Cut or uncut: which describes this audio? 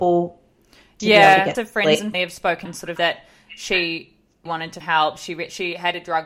cut